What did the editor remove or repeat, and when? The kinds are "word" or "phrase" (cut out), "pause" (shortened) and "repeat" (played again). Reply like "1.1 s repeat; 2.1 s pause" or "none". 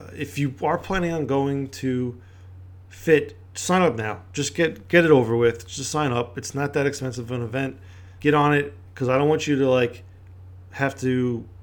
8.2 s word